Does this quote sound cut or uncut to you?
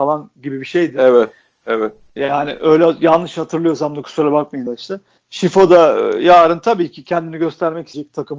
uncut